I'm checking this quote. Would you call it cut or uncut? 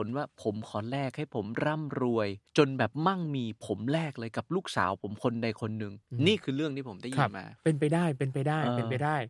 cut